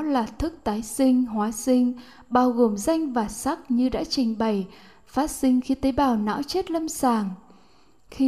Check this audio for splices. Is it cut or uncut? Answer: uncut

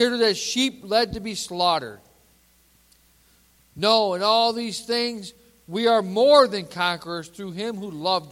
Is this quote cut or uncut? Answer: uncut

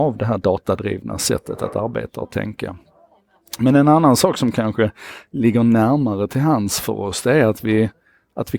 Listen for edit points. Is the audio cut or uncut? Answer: uncut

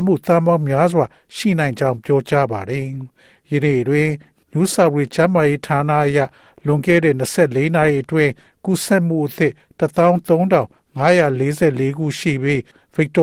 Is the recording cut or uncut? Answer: uncut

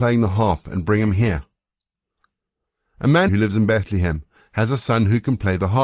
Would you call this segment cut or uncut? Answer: cut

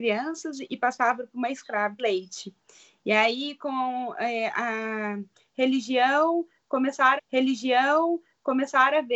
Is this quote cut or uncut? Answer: cut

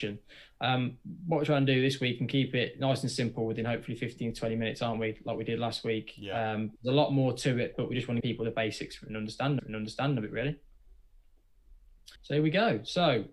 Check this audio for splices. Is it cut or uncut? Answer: cut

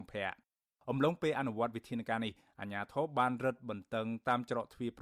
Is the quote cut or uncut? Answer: uncut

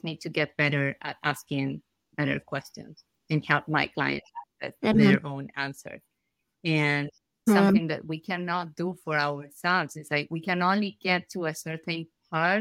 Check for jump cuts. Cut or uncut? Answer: uncut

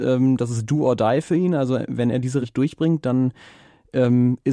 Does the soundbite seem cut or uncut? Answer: cut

